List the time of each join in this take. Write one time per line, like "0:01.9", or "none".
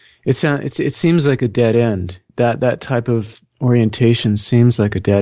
0:02.3
0:03.5